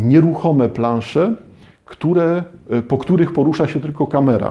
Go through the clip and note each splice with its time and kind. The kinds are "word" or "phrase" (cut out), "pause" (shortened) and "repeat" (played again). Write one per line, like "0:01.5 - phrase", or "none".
none